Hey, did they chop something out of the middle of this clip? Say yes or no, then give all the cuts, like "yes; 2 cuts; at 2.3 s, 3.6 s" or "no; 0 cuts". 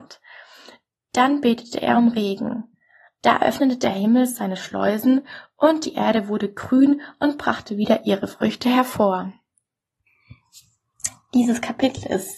no; 0 cuts